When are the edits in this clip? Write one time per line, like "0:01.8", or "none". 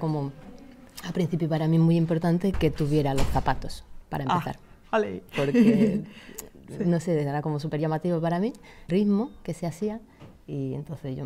0:02.5
0:08.9